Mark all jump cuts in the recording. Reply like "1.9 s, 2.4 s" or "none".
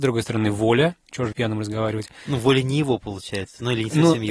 1.3 s